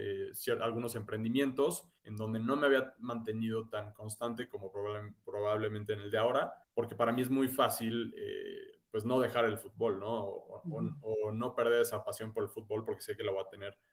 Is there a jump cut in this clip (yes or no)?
yes